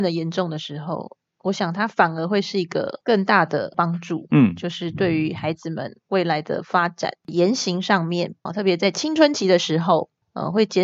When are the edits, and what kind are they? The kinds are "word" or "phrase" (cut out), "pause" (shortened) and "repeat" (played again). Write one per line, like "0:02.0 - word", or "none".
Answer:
0:08.5 - word